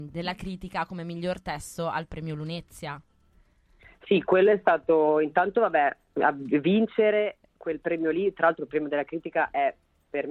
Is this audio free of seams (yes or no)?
yes